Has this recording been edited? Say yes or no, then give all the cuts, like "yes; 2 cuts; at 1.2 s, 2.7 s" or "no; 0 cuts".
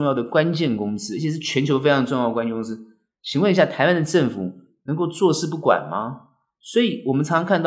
no; 0 cuts